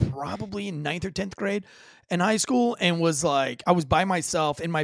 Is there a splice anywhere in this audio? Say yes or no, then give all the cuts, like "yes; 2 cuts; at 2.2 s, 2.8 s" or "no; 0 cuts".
no; 0 cuts